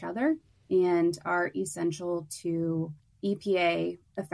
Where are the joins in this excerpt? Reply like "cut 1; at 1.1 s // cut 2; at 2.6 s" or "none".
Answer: none